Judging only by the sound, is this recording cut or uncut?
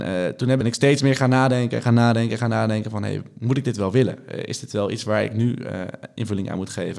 uncut